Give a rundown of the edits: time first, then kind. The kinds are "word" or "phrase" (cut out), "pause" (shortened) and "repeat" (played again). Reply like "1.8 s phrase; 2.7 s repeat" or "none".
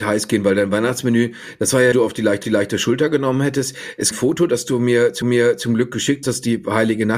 1.9 s phrase; 2.4 s repeat; 4.1 s phrase; 5.2 s repeat; 6.2 s word